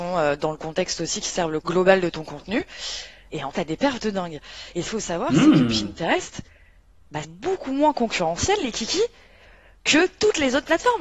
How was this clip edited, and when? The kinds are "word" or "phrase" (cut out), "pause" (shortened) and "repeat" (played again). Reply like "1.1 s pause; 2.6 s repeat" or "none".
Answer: 1.6 s word; 3.5 s word; 4.9 s word; 7.2 s word